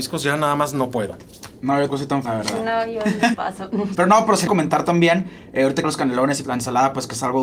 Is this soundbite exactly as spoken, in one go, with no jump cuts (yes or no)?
no